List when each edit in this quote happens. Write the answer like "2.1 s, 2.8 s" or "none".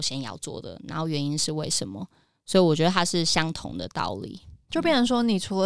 4.7 s